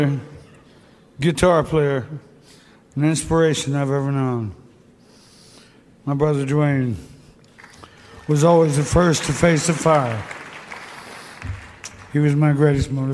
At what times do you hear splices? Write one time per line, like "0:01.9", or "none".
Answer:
none